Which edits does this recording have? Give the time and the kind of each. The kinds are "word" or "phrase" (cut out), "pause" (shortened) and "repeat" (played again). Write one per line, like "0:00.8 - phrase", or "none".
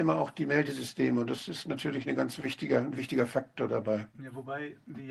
0:04.1 - pause